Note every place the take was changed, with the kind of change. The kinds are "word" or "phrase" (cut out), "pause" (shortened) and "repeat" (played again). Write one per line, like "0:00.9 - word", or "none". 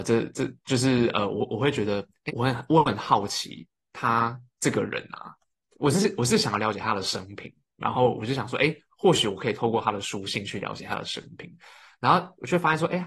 0:02.3 - word